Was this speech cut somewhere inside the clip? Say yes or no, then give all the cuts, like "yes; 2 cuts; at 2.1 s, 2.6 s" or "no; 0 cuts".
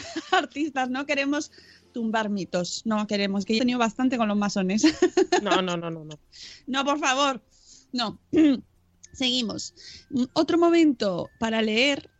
yes; 1 cut; at 3.6 s